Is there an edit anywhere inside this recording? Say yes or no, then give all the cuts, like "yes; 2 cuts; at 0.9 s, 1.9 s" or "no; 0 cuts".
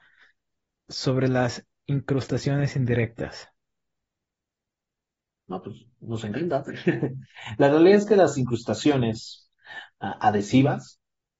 no; 0 cuts